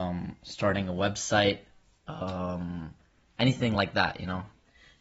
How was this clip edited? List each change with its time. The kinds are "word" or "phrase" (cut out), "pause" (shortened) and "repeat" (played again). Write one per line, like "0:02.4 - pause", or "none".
none